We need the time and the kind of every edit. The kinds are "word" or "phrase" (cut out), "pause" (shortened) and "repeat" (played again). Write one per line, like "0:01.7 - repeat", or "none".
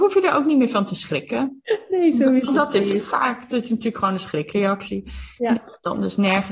none